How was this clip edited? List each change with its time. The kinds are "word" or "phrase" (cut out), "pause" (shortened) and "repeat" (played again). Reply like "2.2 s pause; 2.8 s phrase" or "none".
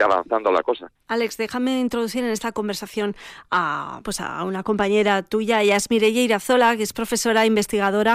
1.0 s pause; 4.0 s word